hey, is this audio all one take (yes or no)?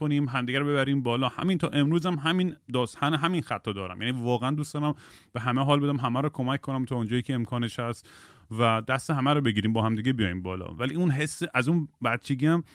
yes